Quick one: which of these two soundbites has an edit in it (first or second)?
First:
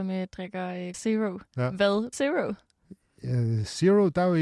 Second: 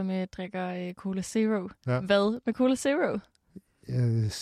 first